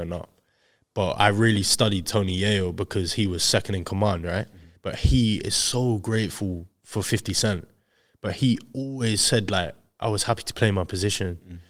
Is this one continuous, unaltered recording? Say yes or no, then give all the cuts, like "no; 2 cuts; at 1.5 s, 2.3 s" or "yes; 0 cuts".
yes; 0 cuts